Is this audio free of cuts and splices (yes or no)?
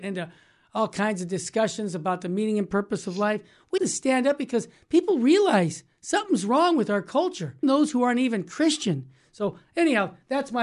no